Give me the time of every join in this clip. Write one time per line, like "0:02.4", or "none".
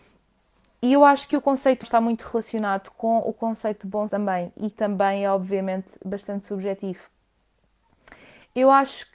0:01.8
0:04.1
0:04.7

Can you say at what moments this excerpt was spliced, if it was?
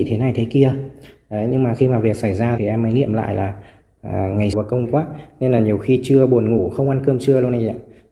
0:02.6
0:04.5
0:04.8

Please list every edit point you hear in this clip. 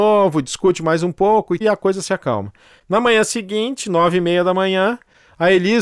0:01.6

